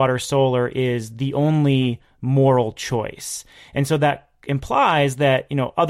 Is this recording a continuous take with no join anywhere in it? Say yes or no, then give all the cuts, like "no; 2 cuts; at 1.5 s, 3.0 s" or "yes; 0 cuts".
yes; 0 cuts